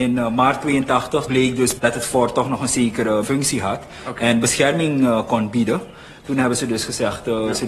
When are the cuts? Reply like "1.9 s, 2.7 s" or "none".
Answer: 1.3 s, 1.8 s, 3.2 s